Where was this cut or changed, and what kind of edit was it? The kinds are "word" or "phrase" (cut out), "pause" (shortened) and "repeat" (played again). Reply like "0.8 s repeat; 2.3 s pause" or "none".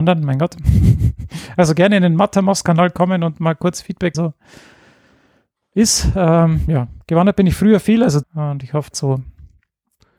4.1 s phrase; 7.0 s pause; 8.2 s phrase; 8.9 s phrase